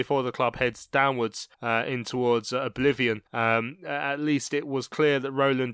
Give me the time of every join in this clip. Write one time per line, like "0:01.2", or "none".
0:01.5
0:03.3